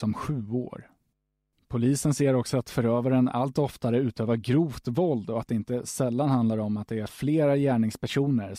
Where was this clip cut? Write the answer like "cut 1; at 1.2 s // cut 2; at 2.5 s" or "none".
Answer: none